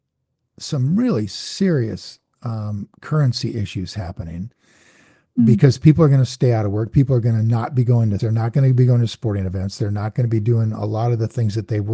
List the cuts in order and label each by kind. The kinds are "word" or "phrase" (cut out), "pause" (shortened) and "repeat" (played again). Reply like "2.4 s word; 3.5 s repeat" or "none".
8.2 s word